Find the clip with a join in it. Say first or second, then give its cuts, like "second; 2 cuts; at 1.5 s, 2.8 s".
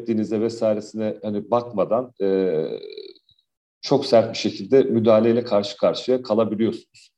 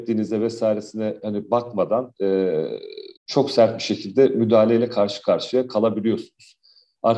second; 1 cut; at 3.2 s